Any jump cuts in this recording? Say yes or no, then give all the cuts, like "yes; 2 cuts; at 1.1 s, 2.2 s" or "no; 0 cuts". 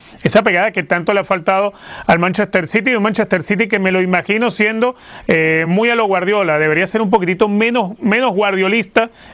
no; 0 cuts